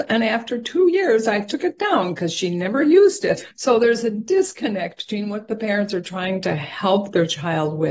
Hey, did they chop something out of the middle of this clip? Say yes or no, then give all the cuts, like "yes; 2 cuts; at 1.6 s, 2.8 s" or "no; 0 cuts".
yes; 1 cut; at 3.5 s